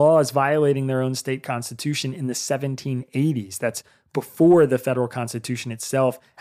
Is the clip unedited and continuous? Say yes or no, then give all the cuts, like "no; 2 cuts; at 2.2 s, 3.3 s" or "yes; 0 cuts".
yes; 0 cuts